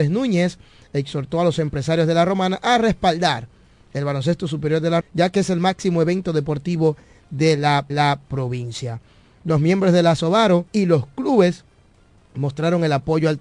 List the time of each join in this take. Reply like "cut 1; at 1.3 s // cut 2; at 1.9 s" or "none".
cut 1; at 5.0 s // cut 2; at 7.9 s // cut 3; at 10.7 s